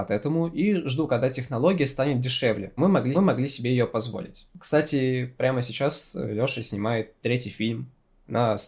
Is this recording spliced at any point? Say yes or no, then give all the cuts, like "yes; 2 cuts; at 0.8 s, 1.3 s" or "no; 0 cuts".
yes; 2 cuts; at 2.8 s, 3.1 s